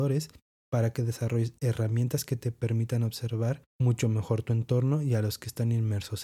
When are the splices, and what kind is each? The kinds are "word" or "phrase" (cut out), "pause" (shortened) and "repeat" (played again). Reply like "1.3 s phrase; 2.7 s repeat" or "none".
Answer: none